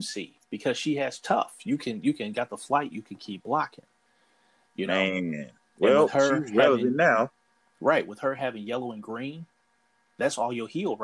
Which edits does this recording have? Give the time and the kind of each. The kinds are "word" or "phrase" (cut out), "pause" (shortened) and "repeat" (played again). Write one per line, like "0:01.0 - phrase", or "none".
none